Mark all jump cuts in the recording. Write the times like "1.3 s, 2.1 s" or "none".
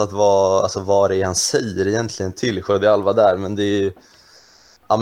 none